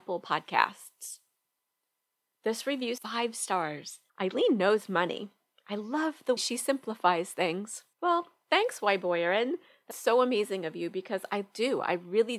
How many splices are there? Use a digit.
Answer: 5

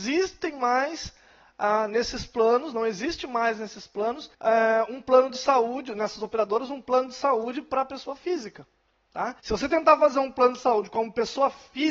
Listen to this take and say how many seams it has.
2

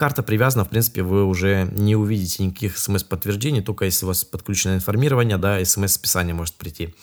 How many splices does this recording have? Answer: 0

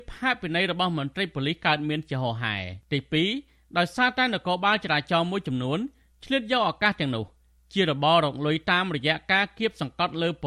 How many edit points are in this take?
1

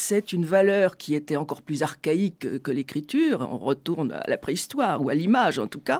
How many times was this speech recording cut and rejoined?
0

